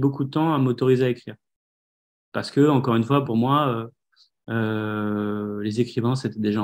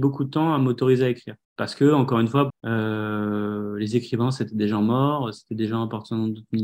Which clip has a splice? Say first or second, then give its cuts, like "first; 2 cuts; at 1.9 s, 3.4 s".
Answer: second; 2 cuts; at 1.4 s, 2.5 s